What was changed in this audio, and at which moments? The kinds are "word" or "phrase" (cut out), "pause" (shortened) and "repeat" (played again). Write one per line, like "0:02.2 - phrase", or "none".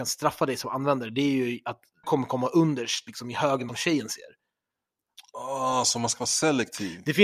0:02.0 - word
0:03.7 - phrase